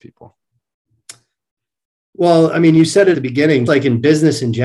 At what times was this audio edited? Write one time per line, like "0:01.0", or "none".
0:03.1
0:03.7

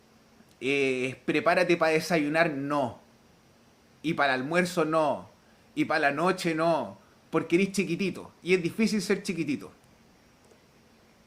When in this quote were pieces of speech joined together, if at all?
none

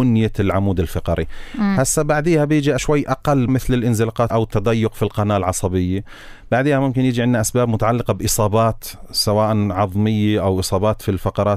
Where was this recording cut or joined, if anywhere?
0:02.8
0:03.5
0:04.3

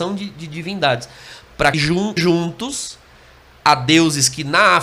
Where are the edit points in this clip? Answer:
0:01.7
0:02.2

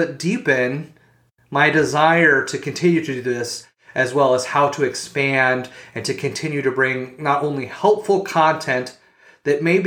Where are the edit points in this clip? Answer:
none

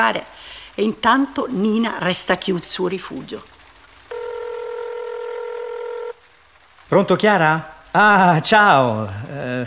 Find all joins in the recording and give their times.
0:02.6

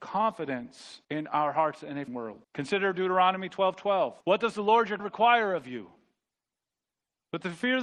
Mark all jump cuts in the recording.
0:01.0
0:02.1
0:02.4
0:04.2
0:05.0

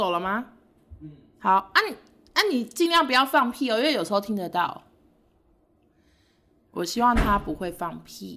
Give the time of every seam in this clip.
none

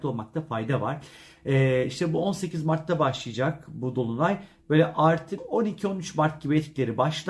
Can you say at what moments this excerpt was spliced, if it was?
0:05.4

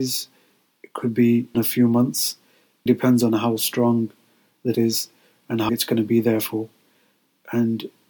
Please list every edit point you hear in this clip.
0:01.5
0:02.9
0:04.7
0:05.7

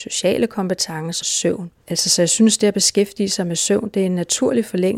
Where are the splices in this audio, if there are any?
0:01.2
0:01.8

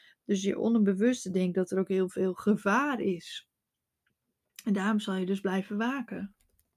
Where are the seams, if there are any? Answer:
none

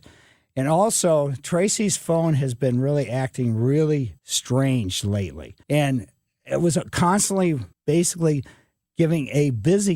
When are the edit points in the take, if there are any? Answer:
0:04.2
0:05.6
0:07.7

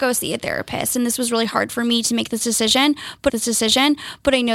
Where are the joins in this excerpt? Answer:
0:03.3

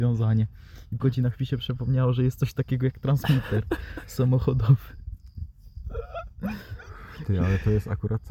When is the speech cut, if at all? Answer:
0:01.0

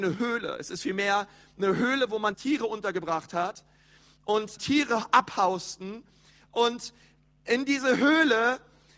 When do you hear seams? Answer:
0:02.3
0:04.6

